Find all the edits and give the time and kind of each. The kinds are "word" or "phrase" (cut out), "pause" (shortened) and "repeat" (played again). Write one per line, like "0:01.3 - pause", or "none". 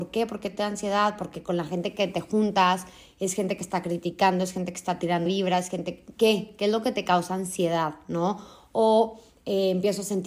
0:05.3 - word